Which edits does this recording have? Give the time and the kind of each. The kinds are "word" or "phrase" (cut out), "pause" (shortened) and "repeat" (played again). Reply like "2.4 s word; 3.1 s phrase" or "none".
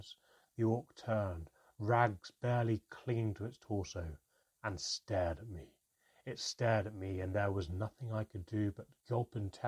none